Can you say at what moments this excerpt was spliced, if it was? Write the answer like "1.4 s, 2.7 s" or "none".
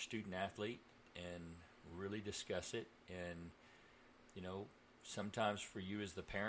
none